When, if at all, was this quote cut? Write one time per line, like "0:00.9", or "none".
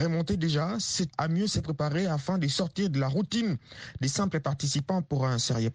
0:01.1